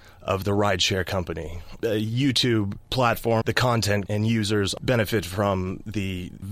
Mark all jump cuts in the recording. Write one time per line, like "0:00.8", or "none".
0:01.8
0:03.4
0:04.1

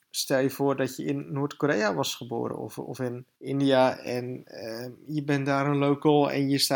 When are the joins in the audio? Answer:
0:03.3

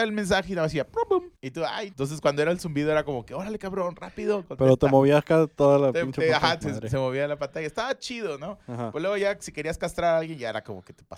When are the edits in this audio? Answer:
0:01.3
0:01.9
0:06.6

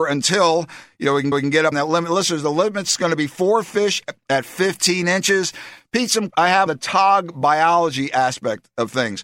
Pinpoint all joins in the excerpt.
0:01.3
0:01.7
0:06.3
0:06.7

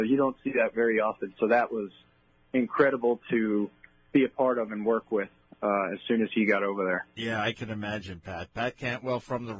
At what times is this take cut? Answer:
none

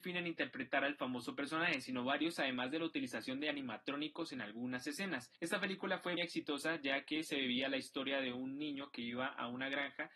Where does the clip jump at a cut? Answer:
0:05.4
0:06.2

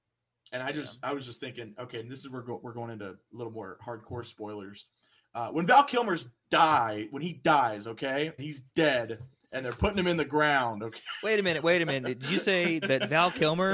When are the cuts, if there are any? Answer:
0:08.4

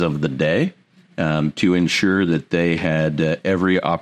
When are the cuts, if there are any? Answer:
none

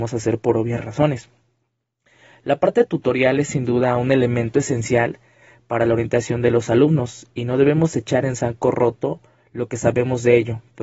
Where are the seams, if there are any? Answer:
none

